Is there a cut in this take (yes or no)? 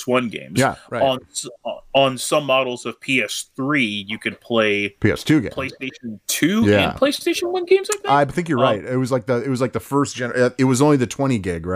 yes